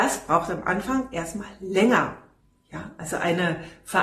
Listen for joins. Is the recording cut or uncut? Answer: uncut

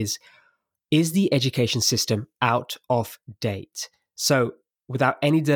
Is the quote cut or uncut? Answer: uncut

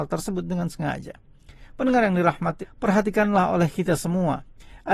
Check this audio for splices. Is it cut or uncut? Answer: cut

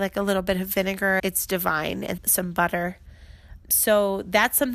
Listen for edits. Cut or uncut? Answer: cut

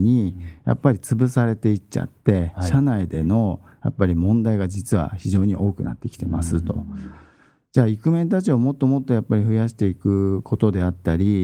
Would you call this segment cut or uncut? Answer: uncut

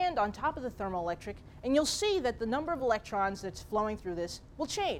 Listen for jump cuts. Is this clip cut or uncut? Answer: uncut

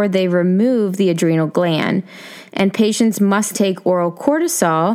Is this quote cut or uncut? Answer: cut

